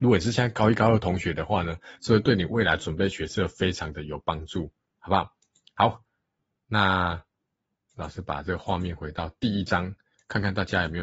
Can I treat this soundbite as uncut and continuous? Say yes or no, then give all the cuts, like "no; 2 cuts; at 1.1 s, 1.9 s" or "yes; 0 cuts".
yes; 0 cuts